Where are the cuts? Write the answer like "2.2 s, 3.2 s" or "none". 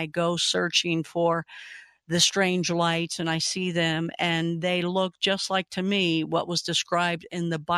none